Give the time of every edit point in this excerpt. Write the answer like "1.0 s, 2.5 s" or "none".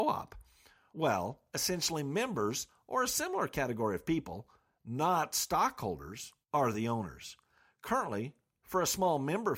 6.4 s

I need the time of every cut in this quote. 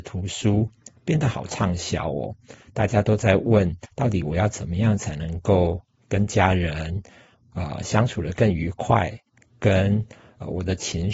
none

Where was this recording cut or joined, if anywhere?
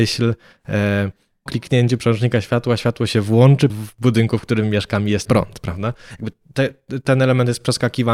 1.5 s, 3.7 s, 5.2 s

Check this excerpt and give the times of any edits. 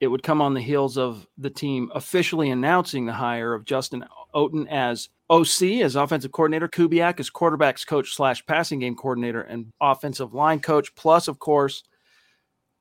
4.3 s, 5.2 s, 6.7 s, 9.7 s

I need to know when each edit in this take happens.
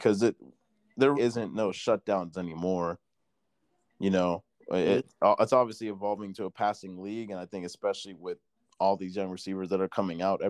1.1 s, 2.3 s

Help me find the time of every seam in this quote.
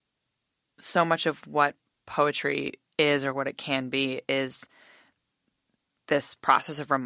none

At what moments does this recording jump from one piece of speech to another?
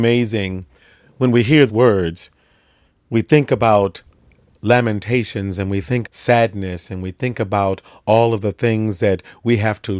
1.7 s, 6.1 s

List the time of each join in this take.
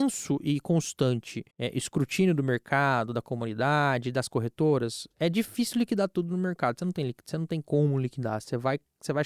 1.5 s

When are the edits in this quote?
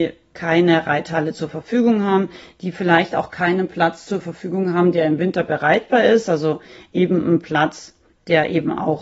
none

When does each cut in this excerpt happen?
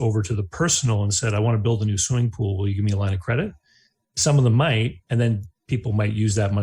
none

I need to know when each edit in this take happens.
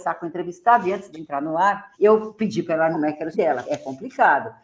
1.1 s, 1.9 s, 2.9 s, 3.3 s, 3.6 s

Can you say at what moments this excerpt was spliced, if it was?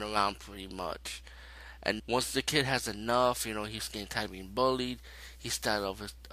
2.0 s

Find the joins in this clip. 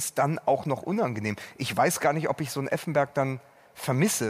none

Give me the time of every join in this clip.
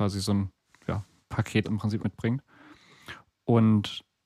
1.6 s, 2.0 s

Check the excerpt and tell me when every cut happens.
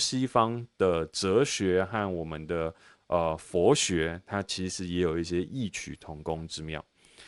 none

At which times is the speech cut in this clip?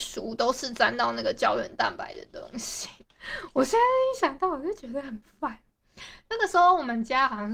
3.0 s

